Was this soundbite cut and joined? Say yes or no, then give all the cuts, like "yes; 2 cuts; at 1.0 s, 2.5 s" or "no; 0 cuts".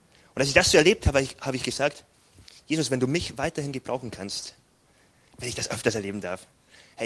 no; 0 cuts